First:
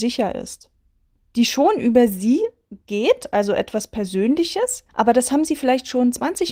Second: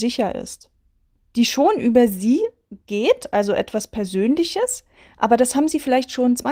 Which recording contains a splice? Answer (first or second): first